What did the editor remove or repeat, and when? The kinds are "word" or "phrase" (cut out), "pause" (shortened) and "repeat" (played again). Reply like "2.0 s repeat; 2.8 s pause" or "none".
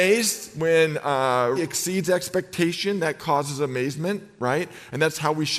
1.6 s word